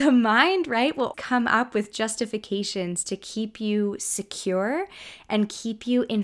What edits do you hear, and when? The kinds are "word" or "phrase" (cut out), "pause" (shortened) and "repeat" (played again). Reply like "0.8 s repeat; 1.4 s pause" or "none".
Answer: 1.1 s word